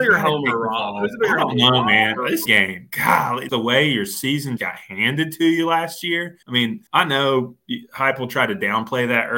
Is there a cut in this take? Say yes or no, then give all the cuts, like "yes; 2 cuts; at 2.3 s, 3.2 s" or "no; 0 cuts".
yes; 5 cuts; at 2.5 s, 3.5 s, 4.6 s, 6.4 s, 6.9 s